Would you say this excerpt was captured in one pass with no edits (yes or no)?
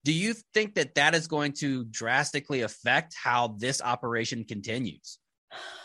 yes